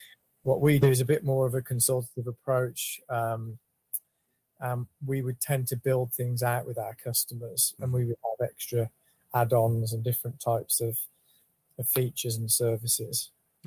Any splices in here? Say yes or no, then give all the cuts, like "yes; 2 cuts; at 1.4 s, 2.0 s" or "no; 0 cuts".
no; 0 cuts